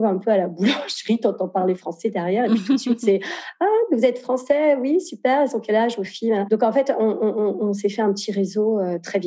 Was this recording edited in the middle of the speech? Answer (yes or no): no